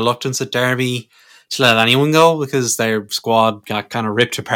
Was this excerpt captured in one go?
yes; 0 cuts

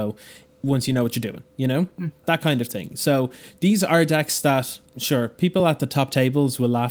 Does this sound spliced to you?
no; 0 cuts

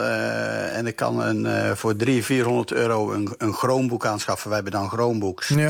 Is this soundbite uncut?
yes; 0 cuts

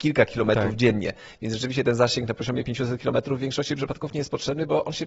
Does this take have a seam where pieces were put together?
no; 0 cuts

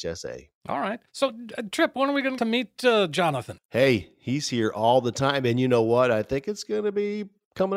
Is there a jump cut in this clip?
yes; 2 cuts; at 1.1 s, 2.4 s

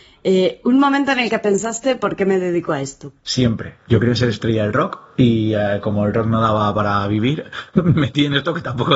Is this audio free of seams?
yes; 0 cuts

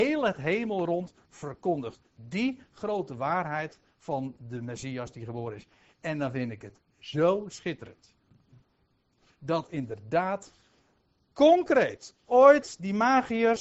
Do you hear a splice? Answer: no; 0 cuts

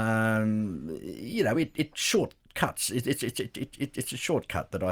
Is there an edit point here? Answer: no; 0 cuts

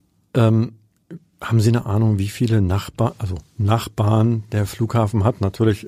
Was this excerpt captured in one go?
yes; 0 cuts

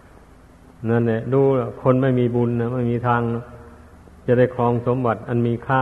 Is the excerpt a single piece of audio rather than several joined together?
yes; 0 cuts

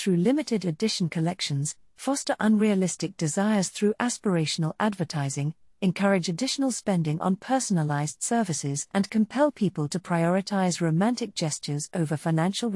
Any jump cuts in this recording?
no; 0 cuts

